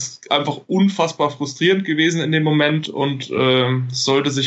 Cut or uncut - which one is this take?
uncut